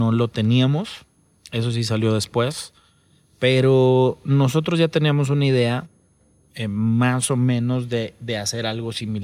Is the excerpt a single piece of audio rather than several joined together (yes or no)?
yes